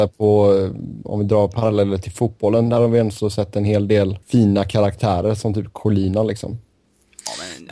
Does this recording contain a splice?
yes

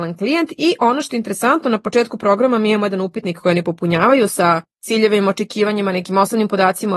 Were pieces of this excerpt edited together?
yes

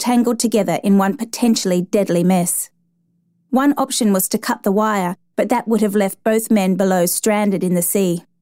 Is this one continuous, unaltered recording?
yes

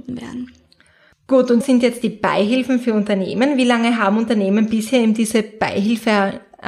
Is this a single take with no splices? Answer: no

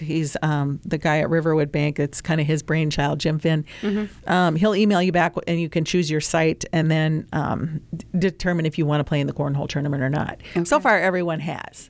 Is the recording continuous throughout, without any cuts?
yes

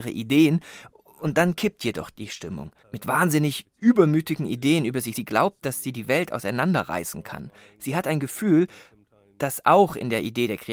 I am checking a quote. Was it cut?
yes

